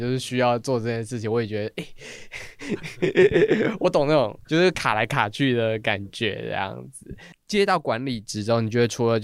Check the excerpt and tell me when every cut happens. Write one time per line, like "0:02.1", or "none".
0:04.4